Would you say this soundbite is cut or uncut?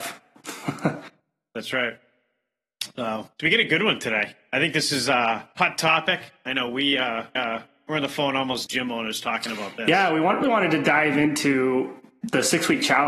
cut